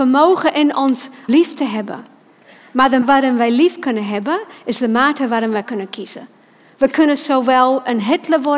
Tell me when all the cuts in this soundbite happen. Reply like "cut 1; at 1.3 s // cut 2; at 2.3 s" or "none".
cut 1; at 1.3 s // cut 2; at 3.0 s // cut 3; at 5.7 s